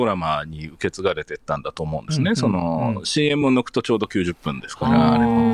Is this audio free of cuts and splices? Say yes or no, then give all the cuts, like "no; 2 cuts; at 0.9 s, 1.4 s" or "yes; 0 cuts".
yes; 0 cuts